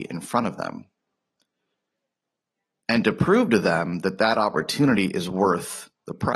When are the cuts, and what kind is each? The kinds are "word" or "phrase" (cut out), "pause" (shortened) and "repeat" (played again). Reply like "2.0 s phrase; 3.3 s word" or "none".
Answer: none